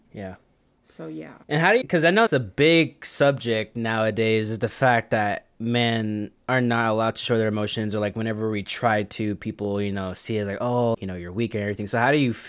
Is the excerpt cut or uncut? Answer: cut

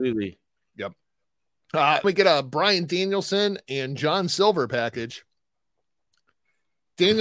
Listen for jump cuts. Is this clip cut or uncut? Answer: cut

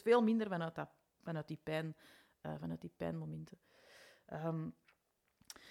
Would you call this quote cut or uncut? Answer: uncut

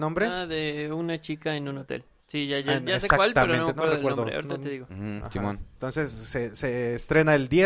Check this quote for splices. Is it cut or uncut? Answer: uncut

